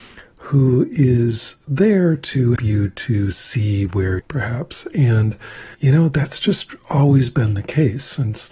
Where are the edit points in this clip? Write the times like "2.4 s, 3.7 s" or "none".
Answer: 2.6 s, 4.2 s, 5.7 s